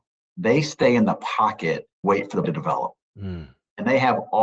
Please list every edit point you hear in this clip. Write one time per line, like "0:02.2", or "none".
0:02.0
0:02.4